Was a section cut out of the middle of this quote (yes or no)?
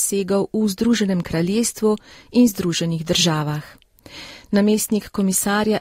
no